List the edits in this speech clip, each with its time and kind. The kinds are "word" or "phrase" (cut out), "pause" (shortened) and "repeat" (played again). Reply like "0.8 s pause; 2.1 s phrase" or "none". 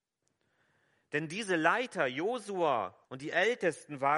3.0 s pause